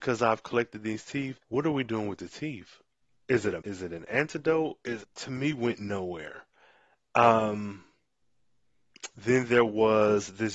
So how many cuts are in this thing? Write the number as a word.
three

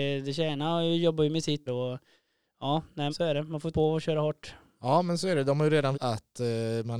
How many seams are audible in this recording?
four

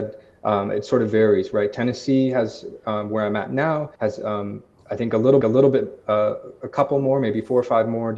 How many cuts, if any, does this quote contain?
two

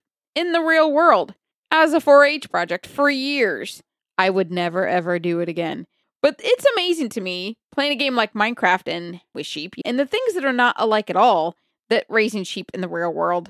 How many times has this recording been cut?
two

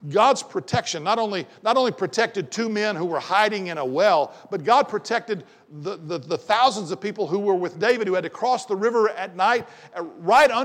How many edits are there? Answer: zero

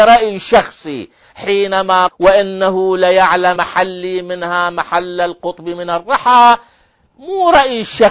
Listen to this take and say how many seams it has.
two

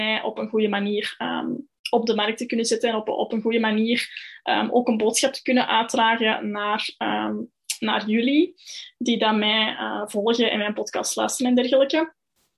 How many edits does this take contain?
one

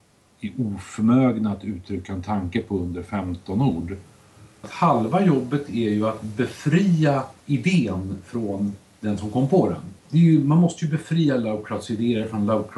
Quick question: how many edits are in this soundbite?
two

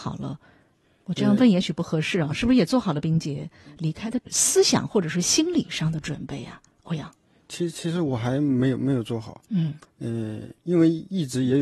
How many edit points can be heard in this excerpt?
zero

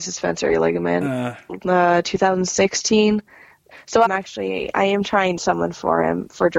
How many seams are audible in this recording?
three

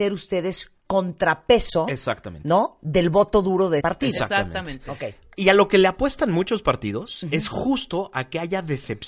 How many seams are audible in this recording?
one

